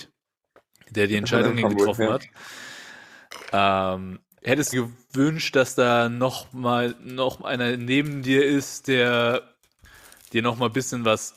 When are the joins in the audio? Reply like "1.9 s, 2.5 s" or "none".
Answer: 4.7 s